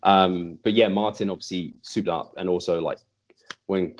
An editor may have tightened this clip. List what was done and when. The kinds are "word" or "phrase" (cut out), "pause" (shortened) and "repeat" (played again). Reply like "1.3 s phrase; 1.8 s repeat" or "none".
2.1 s phrase